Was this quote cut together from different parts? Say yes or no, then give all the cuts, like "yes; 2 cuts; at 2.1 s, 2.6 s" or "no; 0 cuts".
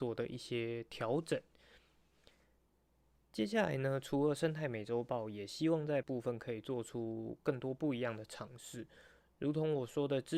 yes; 1 cut; at 6.0 s